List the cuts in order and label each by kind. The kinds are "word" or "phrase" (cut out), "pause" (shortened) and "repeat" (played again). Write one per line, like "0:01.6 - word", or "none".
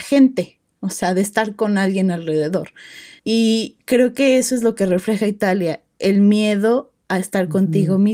0:03.2 - pause